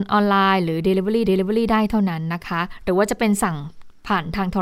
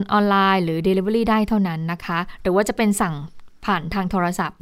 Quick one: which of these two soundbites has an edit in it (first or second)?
first